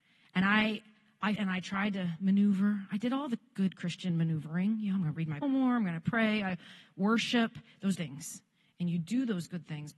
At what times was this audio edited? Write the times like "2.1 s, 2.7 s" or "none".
1.4 s, 5.4 s, 7.9 s